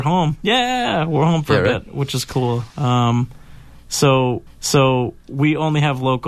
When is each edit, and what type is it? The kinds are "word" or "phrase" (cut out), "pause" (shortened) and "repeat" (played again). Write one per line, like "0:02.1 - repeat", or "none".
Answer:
0:04.5 - repeat

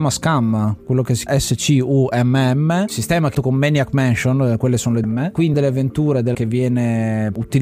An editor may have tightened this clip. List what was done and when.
0:01.3 - word
0:03.3 - word
0:05.0 - word
0:05.5 - word
0:06.3 - word

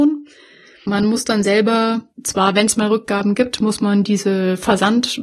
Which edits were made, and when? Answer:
0:02.1 - pause

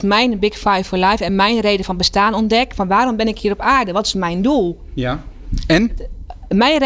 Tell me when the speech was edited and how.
none

